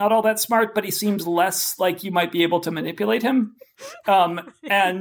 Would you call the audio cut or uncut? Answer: uncut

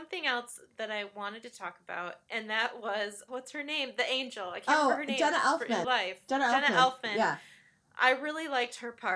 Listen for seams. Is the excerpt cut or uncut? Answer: cut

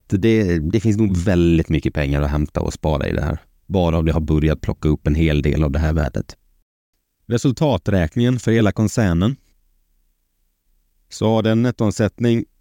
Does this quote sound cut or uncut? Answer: uncut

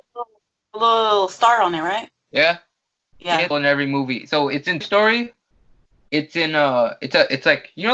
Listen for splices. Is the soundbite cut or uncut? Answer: cut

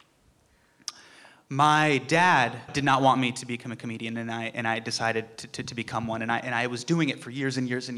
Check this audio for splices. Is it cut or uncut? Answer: cut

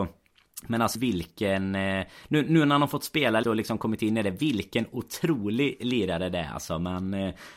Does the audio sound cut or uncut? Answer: cut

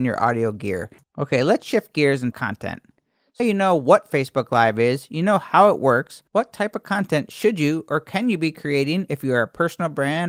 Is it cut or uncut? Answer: cut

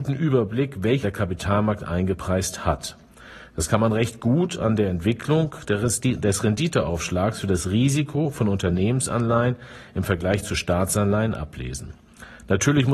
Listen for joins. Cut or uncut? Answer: cut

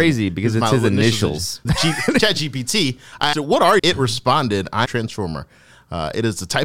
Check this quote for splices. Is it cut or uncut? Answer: cut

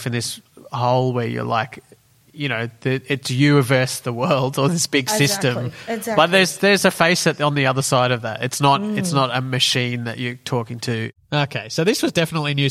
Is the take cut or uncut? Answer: uncut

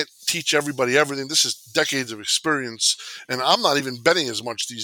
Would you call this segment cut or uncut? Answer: uncut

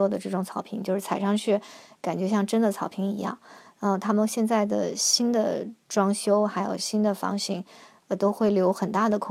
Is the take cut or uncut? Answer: uncut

